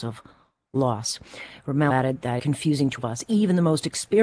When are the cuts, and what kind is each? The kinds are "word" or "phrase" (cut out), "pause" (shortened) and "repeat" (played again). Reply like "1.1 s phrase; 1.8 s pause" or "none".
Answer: 1.9 s word; 2.4 s word; 3.0 s word

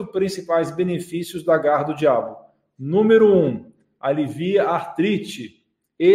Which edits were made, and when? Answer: none

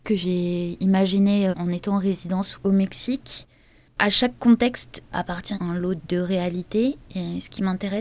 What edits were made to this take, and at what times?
1.5 s word; 5.5 s word

